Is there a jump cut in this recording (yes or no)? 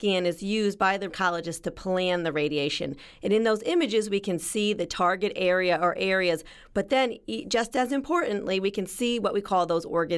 yes